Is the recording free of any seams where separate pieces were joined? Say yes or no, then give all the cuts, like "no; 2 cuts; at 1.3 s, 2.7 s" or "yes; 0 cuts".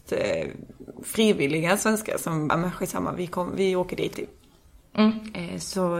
no; 2 cuts; at 2.5 s, 4.1 s